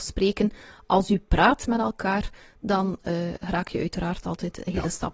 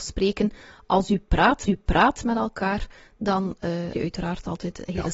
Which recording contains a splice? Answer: second; 2 cuts; at 1.7 s, 3.9 s

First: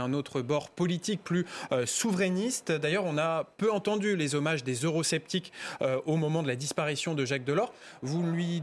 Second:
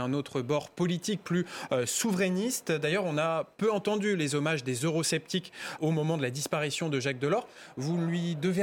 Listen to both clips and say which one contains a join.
second; 1 cut; at 5.8 s

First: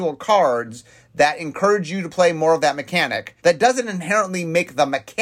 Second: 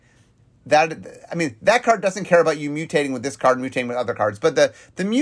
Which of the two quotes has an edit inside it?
first; 1 cut; at 3.4 s

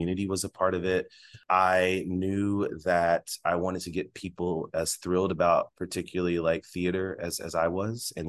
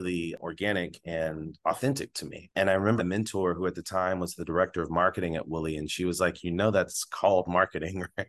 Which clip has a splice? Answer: second; 1 cut; at 3.0 s

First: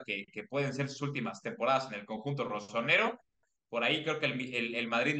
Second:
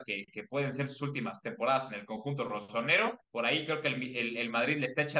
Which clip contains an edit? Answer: second; 1 cut; at 3.2 s

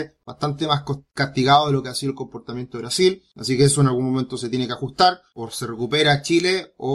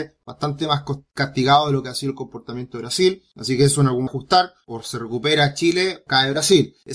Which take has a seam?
second; 2 cuts; at 4.1 s, 6.1 s

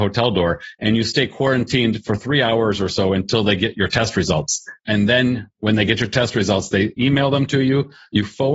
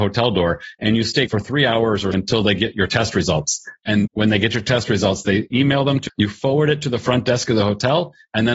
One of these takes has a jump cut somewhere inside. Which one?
second; 4 cuts; at 1.3 s, 2.1 s, 4.1 s, 6.1 s

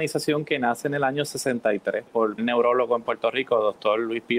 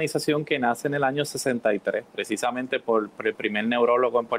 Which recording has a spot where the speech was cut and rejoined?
first; 2 cuts; at 2.1 s, 2.4 s

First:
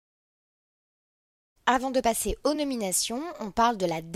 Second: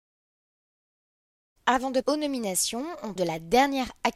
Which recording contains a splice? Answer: second; 2 cuts; at 2.0 s, 3.2 s

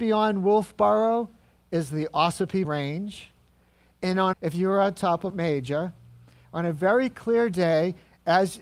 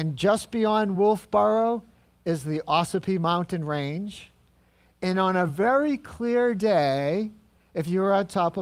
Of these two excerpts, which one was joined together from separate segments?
first; 3 cuts; at 2.6 s, 4.3 s, 5.3 s

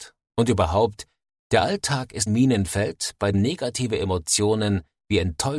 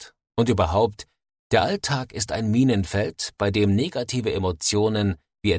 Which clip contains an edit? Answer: first; 2 cuts; at 2.3 s, 3.3 s

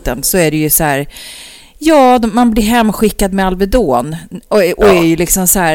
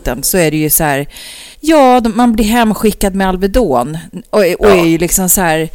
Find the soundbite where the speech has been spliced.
second; 1 cut; at 1.5 s

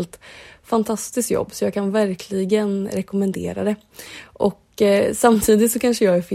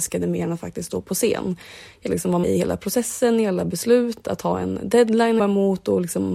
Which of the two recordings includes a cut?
second; 3 cuts; at 2.1 s, 2.4 s, 5.4 s

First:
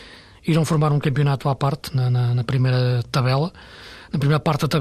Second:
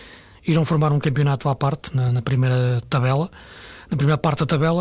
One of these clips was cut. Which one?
second; 1 cut; at 2.1 s

